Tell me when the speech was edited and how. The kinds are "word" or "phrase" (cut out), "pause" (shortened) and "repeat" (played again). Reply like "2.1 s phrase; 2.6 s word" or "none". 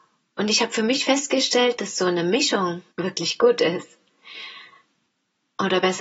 2.9 s pause